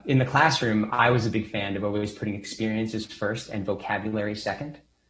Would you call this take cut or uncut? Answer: uncut